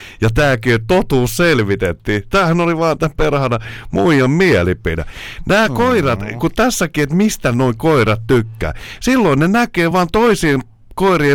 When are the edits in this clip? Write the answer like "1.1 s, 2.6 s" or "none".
none